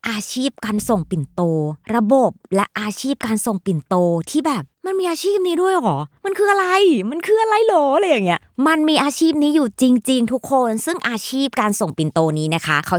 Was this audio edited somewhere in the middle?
yes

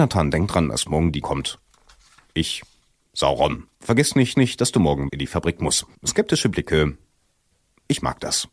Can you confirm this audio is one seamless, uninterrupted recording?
no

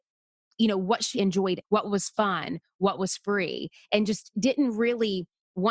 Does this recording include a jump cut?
yes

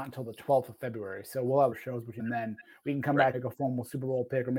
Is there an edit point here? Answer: yes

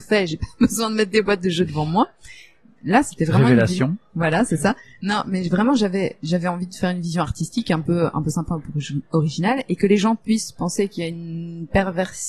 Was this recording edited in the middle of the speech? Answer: no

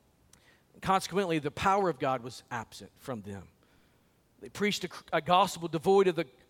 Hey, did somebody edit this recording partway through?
no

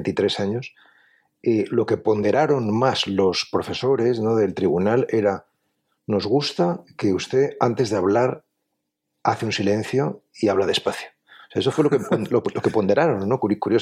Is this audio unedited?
yes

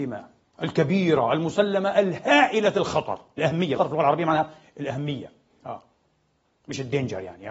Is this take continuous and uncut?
no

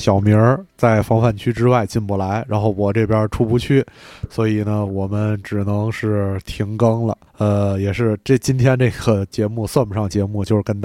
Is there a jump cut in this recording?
yes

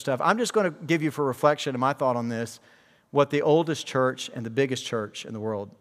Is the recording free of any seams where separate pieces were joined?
yes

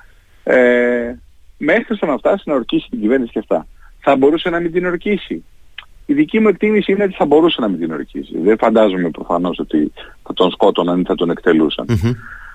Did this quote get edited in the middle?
no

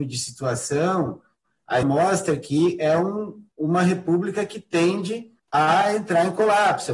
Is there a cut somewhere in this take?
yes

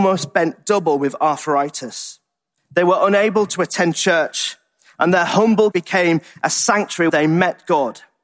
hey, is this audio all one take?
no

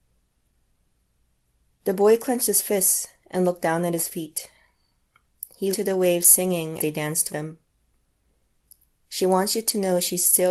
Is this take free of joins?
no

